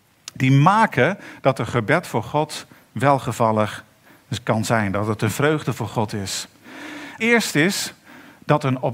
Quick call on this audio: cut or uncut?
cut